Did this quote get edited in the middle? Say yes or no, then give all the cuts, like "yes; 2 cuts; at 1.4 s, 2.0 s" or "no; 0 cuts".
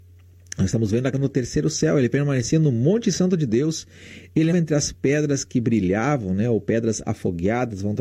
yes; 2 cuts; at 1.1 s, 4.5 s